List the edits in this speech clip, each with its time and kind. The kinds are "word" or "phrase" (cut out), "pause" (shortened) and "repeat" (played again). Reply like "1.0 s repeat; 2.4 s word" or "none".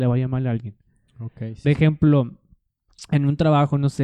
1.6 s word